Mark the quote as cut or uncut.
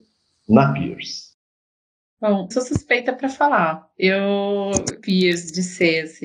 cut